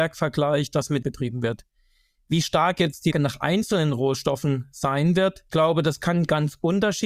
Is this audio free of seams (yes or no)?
no